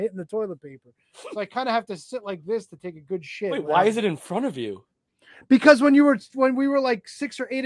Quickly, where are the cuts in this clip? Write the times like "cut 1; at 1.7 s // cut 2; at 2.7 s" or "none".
none